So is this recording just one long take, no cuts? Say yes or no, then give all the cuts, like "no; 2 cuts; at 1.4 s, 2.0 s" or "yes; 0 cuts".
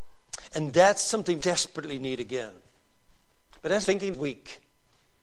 no; 3 cuts; at 1.4 s, 3.8 s, 4.1 s